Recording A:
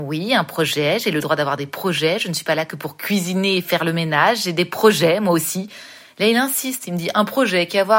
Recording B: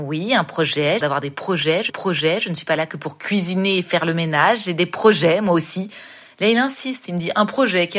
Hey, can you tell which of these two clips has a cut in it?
B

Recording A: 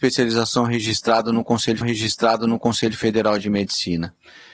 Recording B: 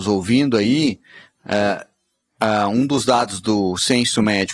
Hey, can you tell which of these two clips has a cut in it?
A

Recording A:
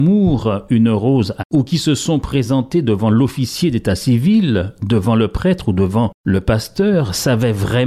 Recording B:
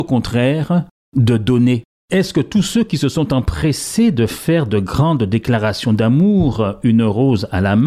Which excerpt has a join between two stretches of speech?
A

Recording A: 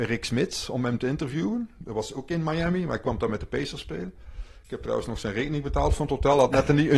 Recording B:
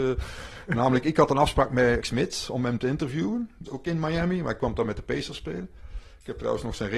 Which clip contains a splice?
B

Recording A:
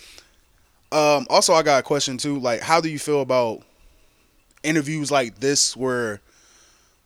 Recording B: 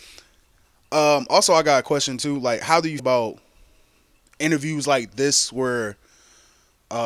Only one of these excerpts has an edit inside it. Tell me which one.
B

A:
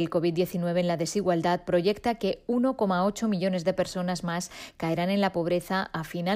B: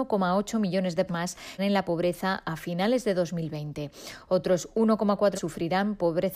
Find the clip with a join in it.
B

